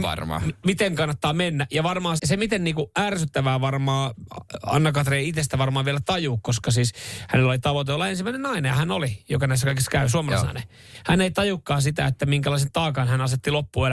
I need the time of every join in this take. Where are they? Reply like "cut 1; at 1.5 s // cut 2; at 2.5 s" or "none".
cut 1; at 2.2 s